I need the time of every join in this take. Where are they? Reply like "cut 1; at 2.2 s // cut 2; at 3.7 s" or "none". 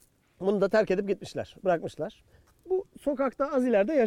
cut 1; at 2.3 s